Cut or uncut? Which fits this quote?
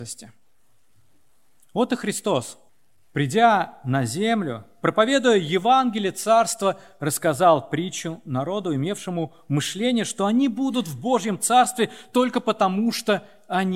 cut